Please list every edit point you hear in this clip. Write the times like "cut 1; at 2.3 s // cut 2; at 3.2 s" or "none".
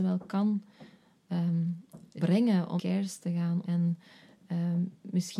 cut 1; at 2.2 s // cut 2; at 2.8 s // cut 3; at 3.6 s

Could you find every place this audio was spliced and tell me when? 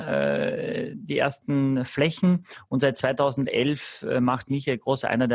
none

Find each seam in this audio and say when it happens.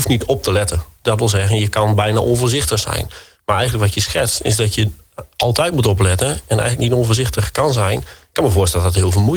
none

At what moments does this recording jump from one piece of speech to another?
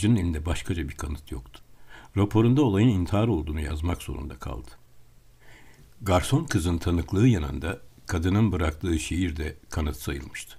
none

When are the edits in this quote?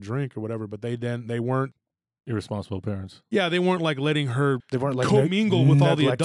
cut 1; at 4.6 s

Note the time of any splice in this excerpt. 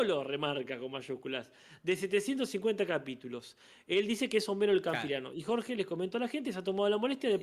none

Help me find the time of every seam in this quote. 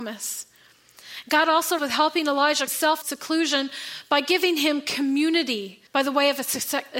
cut 1; at 1.8 s // cut 2; at 2.7 s // cut 3; at 3.0 s // cut 4; at 5.9 s

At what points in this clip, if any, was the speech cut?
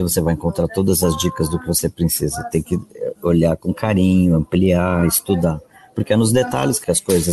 none

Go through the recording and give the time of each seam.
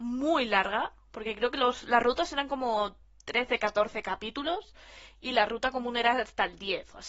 none

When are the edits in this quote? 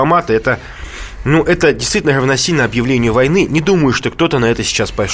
none

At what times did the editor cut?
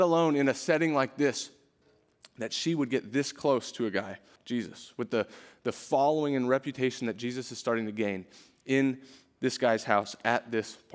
cut 1; at 4.4 s

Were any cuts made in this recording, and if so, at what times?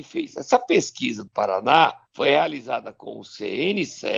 cut 1; at 1.3 s // cut 2; at 2.1 s

